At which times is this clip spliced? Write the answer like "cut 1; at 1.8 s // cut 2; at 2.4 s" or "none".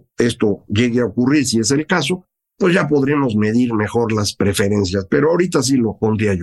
none